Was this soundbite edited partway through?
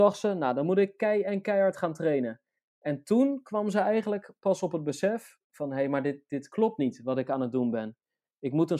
no; 0 cuts

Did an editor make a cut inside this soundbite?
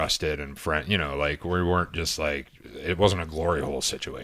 no; 0 cuts

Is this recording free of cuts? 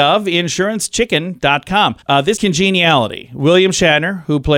no; 2 cuts; at 2.0 s, 2.4 s

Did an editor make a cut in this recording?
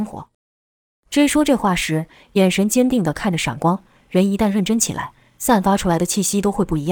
no; 0 cuts

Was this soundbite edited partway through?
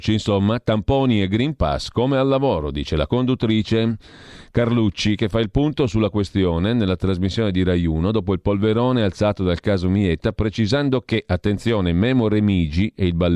no; 0 cuts

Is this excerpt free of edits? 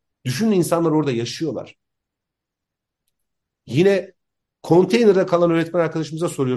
yes; 0 cuts

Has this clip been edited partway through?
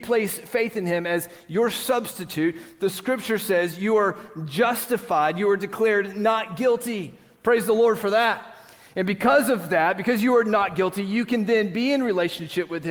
no; 0 cuts

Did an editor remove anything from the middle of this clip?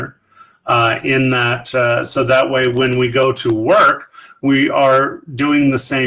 no; 0 cuts

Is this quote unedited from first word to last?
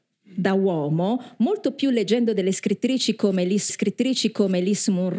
no; 1 cut; at 3.7 s

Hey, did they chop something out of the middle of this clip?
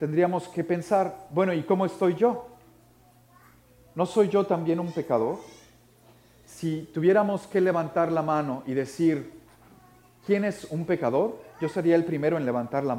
no; 0 cuts

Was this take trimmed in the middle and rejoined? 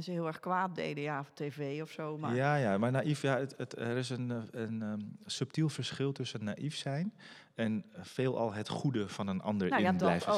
no; 0 cuts

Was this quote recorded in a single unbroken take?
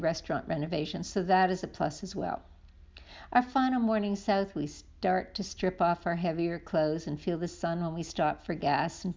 yes; 0 cuts

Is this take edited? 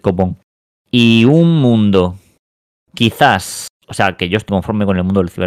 yes; 1 cut; at 4.5 s

